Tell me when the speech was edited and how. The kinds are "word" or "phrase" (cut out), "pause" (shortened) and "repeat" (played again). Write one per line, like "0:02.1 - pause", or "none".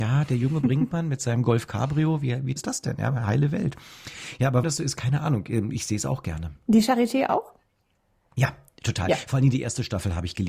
0:02.6 - word
0:04.6 - word